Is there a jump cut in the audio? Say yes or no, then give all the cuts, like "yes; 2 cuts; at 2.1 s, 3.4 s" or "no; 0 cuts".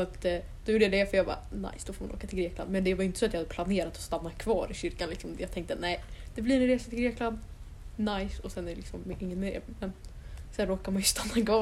no; 0 cuts